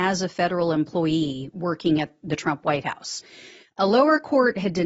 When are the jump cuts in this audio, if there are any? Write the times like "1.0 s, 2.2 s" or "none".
none